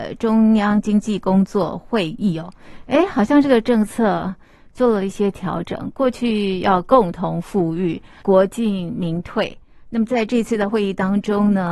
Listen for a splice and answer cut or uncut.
uncut